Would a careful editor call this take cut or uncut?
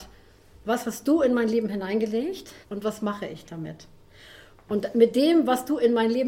cut